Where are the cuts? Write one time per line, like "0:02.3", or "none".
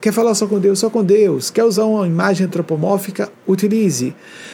none